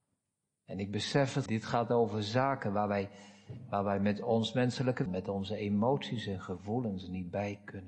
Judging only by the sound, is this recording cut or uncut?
cut